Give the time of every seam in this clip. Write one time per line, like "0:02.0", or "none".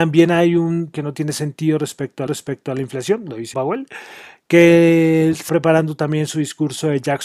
0:00.9
0:02.3
0:03.5
0:05.5